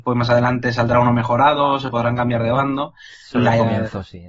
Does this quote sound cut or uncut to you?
uncut